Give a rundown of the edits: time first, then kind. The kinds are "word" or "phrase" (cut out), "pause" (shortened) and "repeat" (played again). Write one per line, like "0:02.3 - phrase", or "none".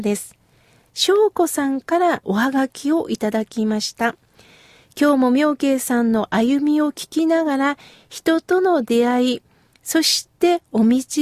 0:02.2 - phrase